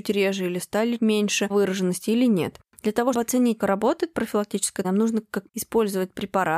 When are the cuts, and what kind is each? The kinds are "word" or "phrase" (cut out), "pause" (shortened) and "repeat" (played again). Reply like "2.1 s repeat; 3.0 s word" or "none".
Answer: 1.0 s word; 1.5 s word; 3.1 s word; 3.6 s word; 4.8 s word; 5.5 s phrase